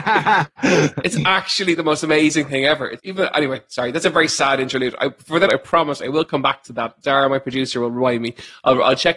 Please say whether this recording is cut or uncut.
cut